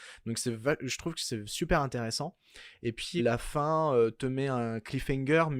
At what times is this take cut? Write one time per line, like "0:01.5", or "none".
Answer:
0:03.2